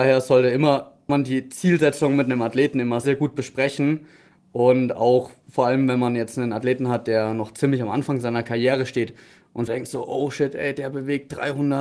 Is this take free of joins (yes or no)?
no